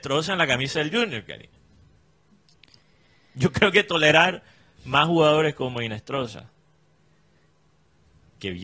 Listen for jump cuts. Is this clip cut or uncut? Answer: uncut